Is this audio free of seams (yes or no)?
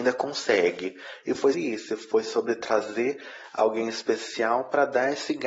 no